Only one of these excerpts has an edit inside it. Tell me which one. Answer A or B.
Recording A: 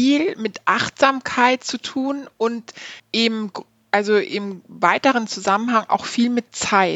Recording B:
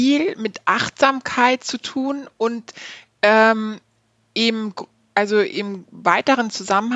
A